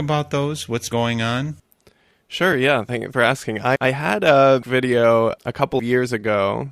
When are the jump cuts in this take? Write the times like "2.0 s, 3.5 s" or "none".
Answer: 0.9 s, 3.1 s, 3.8 s, 4.6 s, 5.8 s